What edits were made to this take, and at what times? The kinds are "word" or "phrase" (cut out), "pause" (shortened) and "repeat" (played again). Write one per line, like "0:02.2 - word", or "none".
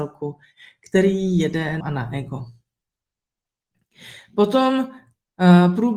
0:01.8 - phrase